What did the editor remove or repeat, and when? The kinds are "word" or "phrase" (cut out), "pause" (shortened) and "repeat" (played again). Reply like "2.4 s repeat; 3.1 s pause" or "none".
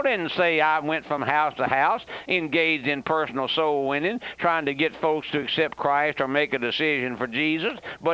none